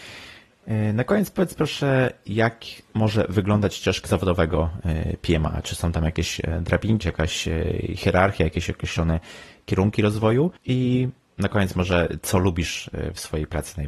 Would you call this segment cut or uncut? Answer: cut